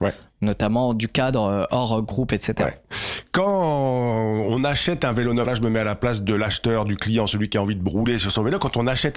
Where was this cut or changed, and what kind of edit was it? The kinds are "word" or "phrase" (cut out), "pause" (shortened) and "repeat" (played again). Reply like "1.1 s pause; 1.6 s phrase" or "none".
5.5 s word